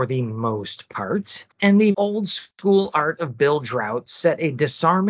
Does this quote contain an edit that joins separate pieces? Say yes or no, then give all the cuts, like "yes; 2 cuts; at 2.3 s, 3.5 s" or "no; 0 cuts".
yes; 2 cuts; at 1.5 s, 1.9 s